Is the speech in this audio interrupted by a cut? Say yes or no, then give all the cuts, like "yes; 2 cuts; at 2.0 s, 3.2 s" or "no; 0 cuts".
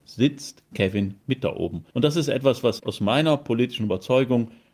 yes; 3 cuts; at 1.2 s, 1.9 s, 2.8 s